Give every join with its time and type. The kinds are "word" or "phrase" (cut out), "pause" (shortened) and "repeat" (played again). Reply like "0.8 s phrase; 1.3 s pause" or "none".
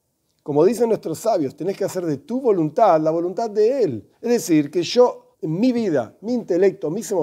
4.1 s pause; 5.3 s pause